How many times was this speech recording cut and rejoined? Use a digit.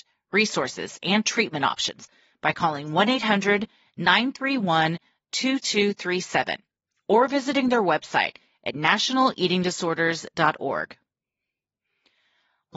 0